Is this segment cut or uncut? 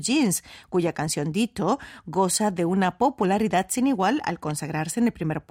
uncut